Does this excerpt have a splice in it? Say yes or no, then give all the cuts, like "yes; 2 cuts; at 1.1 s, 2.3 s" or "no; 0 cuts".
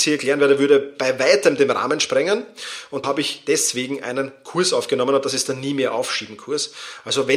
yes; 1 cut; at 3.0 s